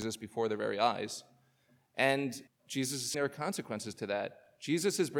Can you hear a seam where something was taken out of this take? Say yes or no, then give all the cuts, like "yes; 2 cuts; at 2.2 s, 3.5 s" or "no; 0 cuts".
yes; 2 cuts; at 2.5 s, 3.1 s